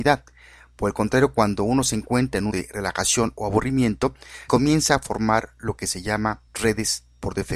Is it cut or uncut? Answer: cut